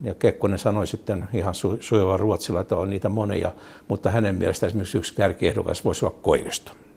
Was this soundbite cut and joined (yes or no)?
no